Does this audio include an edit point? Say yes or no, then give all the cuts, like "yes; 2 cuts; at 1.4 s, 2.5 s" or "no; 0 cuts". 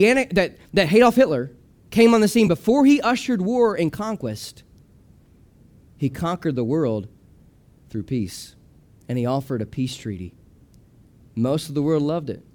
no; 0 cuts